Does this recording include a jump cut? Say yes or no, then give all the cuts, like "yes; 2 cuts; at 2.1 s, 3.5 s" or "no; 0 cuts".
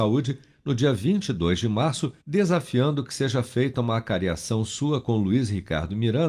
yes; 1 cut; at 2.2 s